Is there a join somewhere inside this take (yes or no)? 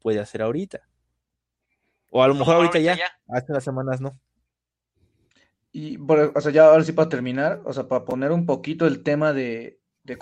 no